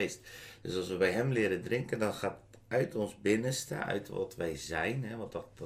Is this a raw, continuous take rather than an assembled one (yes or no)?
yes